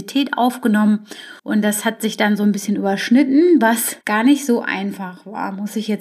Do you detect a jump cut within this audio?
yes; 2 cuts; at 1.4 s, 4.0 s

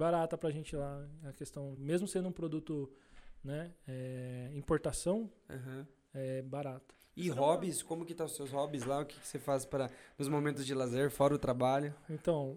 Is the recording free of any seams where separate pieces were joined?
no; 1 cut; at 1.8 s

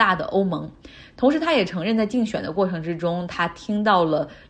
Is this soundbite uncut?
yes; 0 cuts

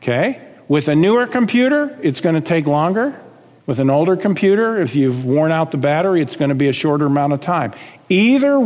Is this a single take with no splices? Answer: yes; 0 cuts

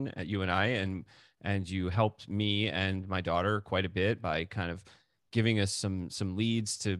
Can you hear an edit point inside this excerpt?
no; 0 cuts

